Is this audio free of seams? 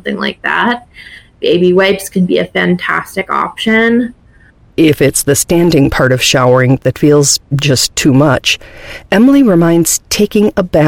yes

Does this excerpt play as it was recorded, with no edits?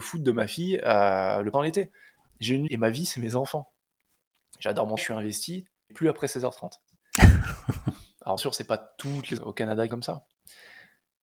no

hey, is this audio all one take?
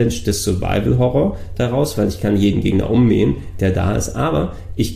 yes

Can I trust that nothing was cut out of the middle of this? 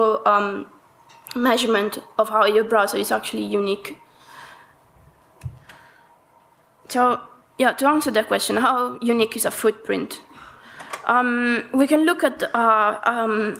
yes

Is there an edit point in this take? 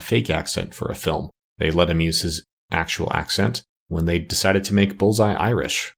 no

